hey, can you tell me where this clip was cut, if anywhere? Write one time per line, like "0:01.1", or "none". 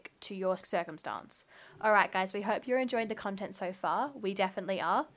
none